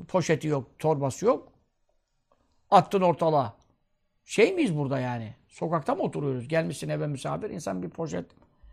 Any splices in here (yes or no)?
no